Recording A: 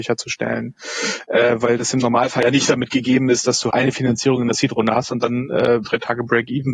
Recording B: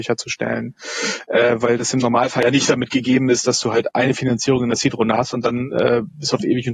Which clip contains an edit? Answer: A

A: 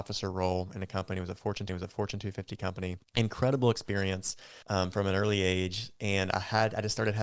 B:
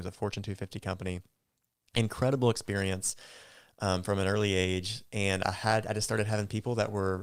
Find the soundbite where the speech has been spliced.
A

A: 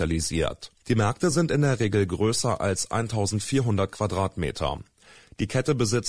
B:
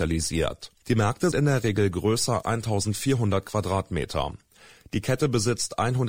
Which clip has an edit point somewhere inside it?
B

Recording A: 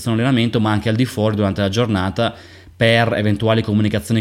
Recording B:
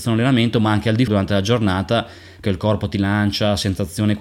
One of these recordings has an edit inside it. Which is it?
B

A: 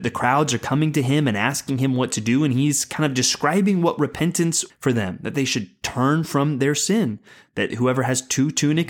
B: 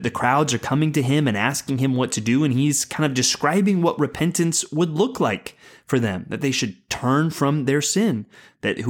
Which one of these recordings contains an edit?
A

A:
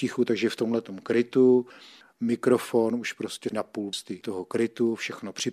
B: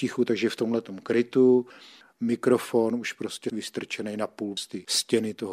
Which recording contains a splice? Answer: A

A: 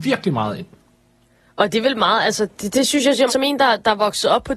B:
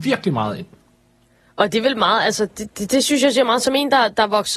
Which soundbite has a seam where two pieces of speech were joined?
A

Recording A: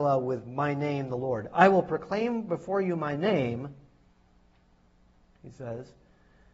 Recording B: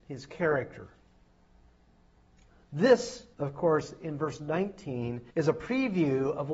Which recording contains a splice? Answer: B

